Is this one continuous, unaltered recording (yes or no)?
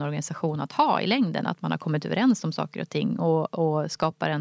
yes